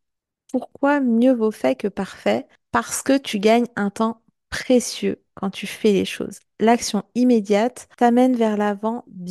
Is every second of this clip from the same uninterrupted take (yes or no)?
yes